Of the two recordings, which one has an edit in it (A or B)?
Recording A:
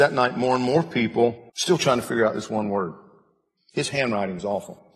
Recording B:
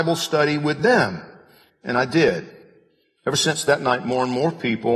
A